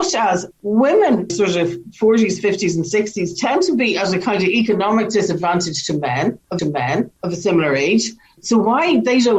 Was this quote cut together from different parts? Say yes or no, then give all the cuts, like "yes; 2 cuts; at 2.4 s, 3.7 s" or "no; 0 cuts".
yes; 2 cuts; at 1.3 s, 6.6 s